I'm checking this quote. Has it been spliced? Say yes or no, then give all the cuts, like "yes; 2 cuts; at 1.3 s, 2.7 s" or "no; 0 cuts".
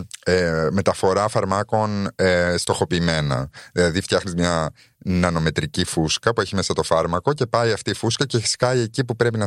no; 0 cuts